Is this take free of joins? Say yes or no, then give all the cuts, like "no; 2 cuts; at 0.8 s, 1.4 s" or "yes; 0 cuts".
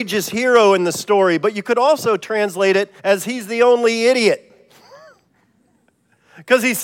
no; 1 cut; at 3.0 s